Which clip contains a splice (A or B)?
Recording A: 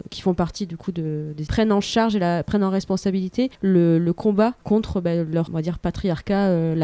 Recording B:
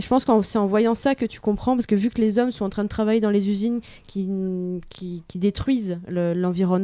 A